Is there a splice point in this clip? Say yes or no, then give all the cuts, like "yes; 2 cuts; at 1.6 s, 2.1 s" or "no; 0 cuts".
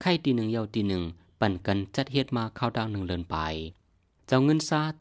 no; 0 cuts